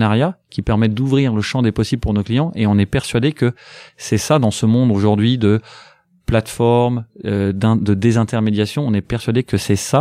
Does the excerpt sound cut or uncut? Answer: uncut